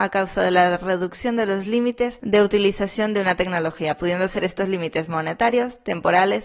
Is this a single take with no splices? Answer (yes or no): yes